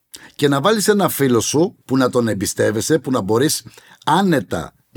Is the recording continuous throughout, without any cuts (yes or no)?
no